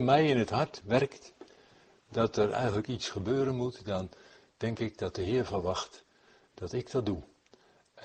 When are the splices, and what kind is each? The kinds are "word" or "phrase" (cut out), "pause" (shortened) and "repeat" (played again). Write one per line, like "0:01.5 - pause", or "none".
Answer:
none